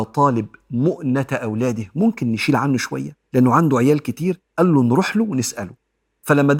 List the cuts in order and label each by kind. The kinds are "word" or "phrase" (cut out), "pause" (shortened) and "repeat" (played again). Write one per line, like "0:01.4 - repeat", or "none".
0:03.3 - pause
0:04.5 - pause